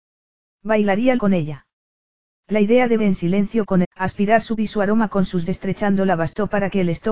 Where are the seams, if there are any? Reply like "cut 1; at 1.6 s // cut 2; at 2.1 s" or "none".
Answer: cut 1; at 1.2 s // cut 2; at 3.0 s // cut 3; at 3.8 s // cut 4; at 4.6 s // cut 5; at 5.5 s